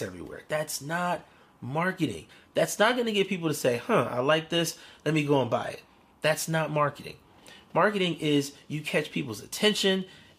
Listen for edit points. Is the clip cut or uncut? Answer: uncut